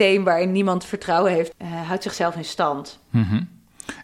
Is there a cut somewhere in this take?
yes; 1 cut; at 1.5 s

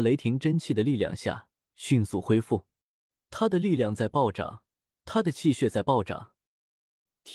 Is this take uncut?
yes; 0 cuts

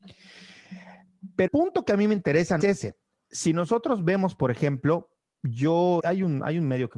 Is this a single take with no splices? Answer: no; 3 cuts; at 1.5 s, 2.6 s, 6.0 s

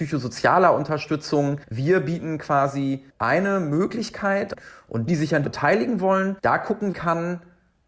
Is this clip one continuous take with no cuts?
no; 6 cuts; at 1.6 s, 3.1 s, 5.1 s, 5.4 s, 6.4 s, 6.9 s

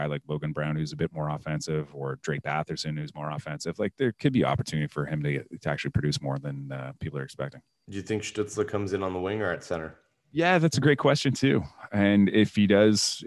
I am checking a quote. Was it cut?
no; 0 cuts

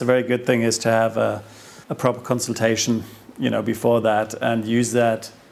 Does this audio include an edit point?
yes; 1 cut; at 1.8 s

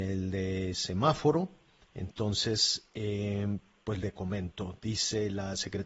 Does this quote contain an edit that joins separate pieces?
no; 0 cuts

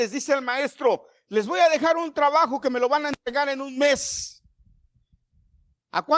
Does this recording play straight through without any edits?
yes; 0 cuts

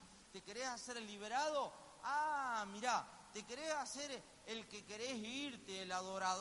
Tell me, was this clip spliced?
no; 0 cuts

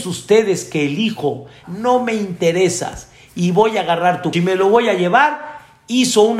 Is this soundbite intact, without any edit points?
no; 2 cuts; at 1.6 s, 4.3 s

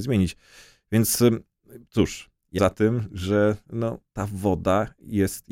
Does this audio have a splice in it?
yes; 1 cut; at 2.6 s

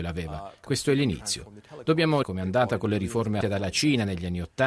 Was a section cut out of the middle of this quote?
yes; 2 cuts; at 2.2 s, 3.4 s

